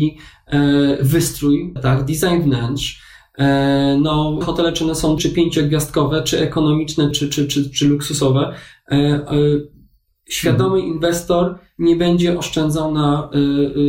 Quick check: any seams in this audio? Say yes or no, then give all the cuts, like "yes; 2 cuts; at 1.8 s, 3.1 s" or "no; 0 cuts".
yes; 4 cuts; at 1.8 s, 4.4 s, 5.2 s, 7.1 s